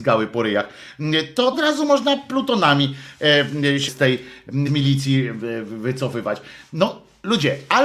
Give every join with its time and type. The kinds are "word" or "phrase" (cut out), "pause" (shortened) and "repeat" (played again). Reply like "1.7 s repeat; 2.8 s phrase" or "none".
1.5 s word; 3.9 s word; 4.7 s word

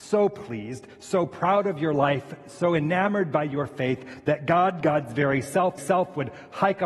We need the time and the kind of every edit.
5.8 s repeat

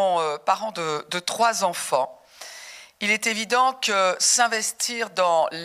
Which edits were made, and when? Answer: none

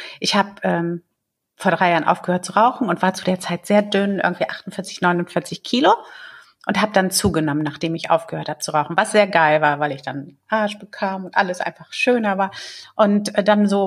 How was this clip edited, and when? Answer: none

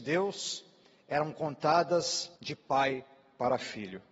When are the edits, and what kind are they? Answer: 2.4 s pause

